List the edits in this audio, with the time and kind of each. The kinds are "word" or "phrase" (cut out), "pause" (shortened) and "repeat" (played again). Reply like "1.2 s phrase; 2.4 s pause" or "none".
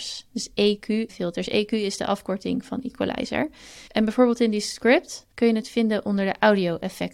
1.1 s word; 3.9 s pause; 5.3 s pause